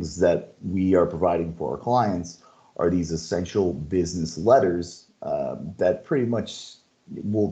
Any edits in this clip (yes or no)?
no